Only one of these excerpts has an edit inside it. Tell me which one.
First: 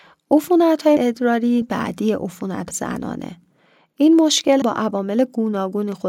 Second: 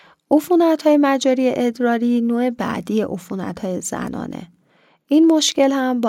first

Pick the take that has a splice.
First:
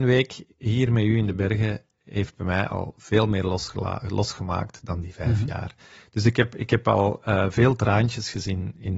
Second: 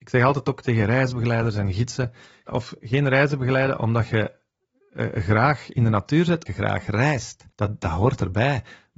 second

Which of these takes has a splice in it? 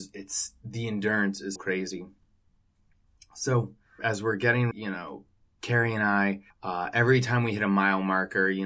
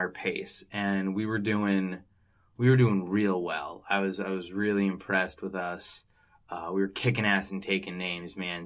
first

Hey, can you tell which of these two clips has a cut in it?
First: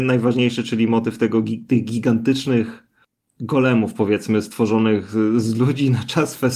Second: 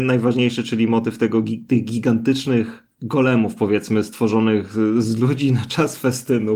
second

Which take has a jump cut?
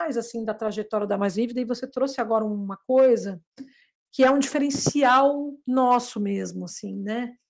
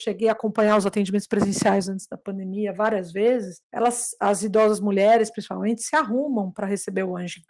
second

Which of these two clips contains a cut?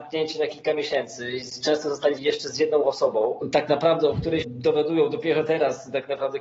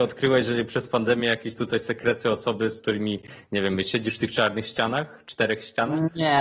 first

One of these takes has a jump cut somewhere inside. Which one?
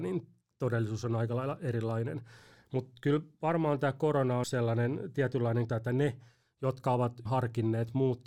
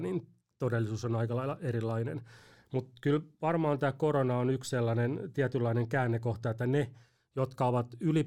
first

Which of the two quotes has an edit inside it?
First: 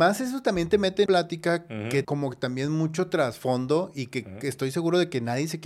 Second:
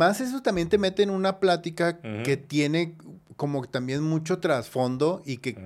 first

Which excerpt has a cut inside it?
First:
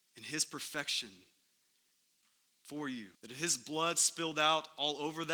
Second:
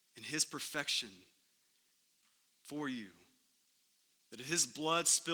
first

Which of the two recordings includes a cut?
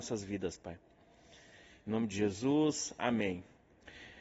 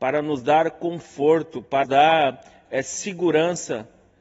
second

